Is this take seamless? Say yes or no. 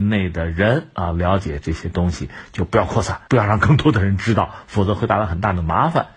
no